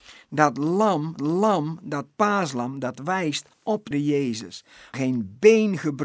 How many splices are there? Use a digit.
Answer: 4